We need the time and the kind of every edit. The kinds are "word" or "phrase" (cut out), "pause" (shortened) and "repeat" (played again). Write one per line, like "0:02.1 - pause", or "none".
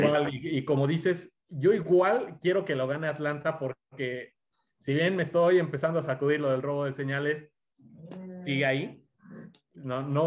0:01.4 - pause